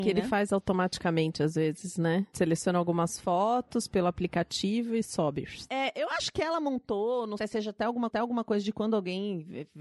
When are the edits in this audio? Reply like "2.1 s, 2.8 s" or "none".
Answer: 7.4 s, 8.1 s